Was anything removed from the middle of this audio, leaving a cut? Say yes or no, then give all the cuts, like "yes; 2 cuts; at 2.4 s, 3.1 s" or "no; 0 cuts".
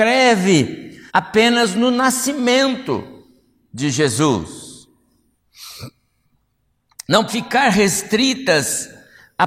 yes; 2 cuts; at 1.1 s, 7.3 s